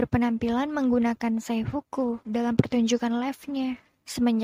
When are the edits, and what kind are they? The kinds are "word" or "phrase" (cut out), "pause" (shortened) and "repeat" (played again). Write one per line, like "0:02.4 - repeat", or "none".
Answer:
none